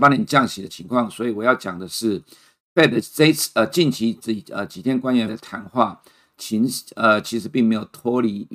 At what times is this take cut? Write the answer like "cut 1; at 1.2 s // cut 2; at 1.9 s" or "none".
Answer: cut 1; at 5.3 s